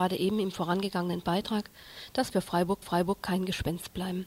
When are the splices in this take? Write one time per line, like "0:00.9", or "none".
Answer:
0:02.3
0:02.8

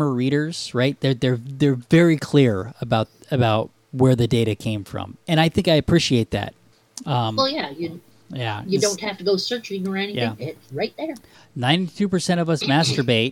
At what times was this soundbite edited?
none

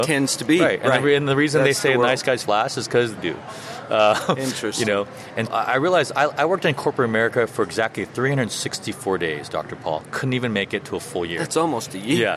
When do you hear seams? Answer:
0:02.4
0:03.2
0:05.5

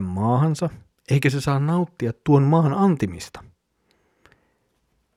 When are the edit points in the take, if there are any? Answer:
none

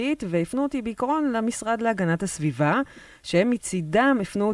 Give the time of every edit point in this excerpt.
none

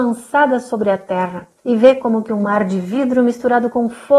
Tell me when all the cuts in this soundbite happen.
0:01.6

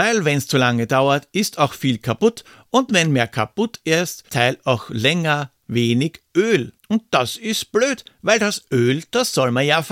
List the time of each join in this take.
0:04.3
0:06.8

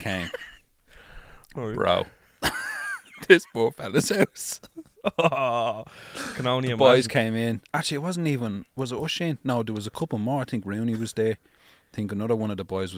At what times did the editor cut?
none

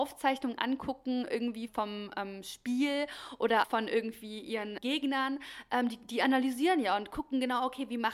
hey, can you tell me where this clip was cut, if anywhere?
0:01.7
0:03.6
0:04.8

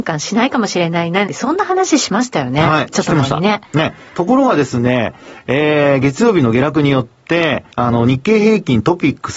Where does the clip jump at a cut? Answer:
0:01.3
0:07.7

